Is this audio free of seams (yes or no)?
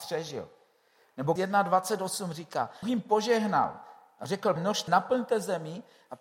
no